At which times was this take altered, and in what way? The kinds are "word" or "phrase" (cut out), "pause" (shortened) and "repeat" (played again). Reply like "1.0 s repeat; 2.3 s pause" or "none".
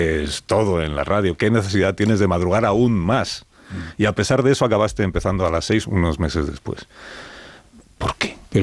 5.8 s word